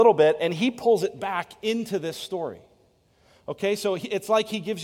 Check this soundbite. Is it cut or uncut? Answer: uncut